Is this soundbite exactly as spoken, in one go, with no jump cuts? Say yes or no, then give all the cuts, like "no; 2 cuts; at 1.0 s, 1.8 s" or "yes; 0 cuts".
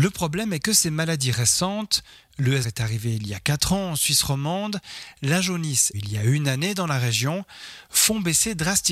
no; 2 cuts; at 2.6 s, 5.9 s